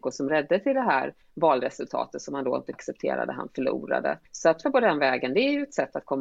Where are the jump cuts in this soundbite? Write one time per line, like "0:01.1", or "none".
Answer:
0:01.2
0:02.7
0:04.3
0:04.6